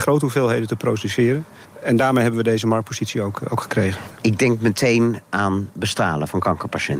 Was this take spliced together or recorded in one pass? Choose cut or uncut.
uncut